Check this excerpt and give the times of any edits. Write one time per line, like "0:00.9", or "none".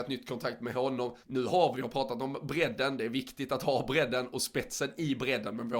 0:01.2
0:01.7